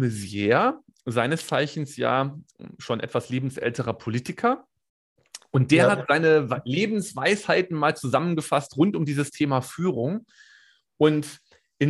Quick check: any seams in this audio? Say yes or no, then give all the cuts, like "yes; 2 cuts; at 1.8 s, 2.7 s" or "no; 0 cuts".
no; 0 cuts